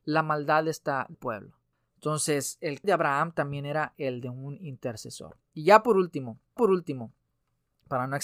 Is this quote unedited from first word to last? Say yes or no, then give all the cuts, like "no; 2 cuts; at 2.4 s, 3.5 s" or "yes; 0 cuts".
no; 3 cuts; at 1.1 s, 2.8 s, 6.6 s